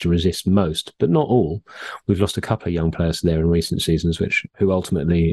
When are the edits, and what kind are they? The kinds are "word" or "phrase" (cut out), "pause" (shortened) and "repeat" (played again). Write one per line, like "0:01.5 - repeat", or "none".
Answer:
none